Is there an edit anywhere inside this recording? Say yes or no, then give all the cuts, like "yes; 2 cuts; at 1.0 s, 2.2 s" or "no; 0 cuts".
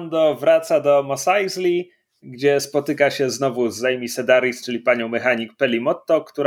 no; 0 cuts